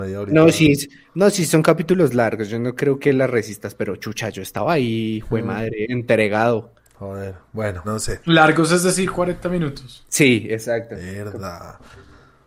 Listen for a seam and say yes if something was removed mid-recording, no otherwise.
yes